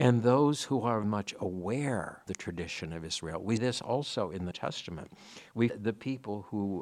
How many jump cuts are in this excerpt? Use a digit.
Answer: 5